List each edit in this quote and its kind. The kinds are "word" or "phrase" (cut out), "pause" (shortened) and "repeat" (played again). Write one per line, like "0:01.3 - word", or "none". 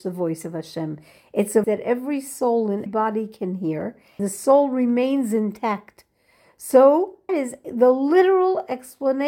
0:01.6 - word
0:02.9 - word
0:04.2 - word
0:07.3 - word
0:07.6 - word